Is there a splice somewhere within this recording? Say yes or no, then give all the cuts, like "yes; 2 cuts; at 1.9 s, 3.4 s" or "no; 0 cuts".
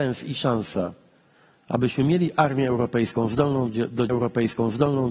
yes; 1 cut; at 4.1 s